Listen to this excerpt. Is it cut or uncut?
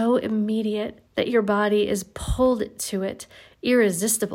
cut